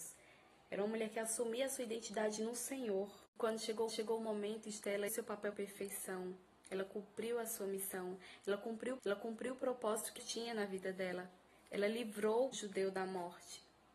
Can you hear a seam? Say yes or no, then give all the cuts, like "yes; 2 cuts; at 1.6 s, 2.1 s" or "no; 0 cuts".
yes; 8 cuts; at 3.3 s, 3.9 s, 5.1 s, 5.5 s, 9.0 s, 10.2 s, 11.5 s, 12.5 s